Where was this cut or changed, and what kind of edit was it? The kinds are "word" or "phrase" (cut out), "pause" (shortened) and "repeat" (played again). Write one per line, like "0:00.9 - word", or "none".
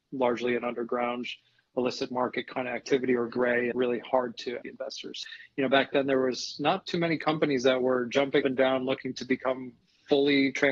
0:03.3 - word
0:03.7 - word
0:04.6 - word
0:08.4 - word